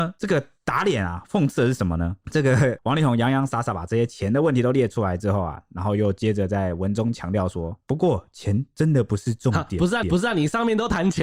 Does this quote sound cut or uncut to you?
cut